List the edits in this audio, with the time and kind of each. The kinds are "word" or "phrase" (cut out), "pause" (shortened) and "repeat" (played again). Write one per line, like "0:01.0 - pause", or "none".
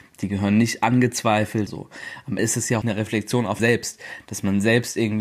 0:01.7 - word
0:02.4 - word
0:02.8 - word
0:03.6 - word